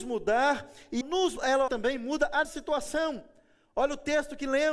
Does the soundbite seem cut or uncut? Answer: cut